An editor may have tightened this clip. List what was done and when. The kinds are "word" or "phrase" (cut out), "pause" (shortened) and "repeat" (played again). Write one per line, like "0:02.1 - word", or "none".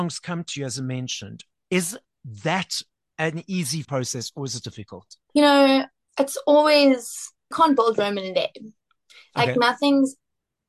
0:03.8 - word
0:04.6 - word
0:07.5 - word